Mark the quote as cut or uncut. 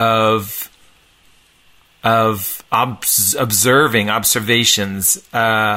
uncut